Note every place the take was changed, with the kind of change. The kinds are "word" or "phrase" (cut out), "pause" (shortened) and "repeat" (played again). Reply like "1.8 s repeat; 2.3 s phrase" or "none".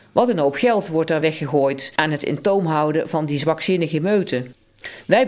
none